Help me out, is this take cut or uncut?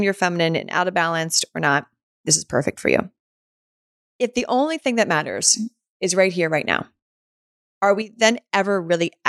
uncut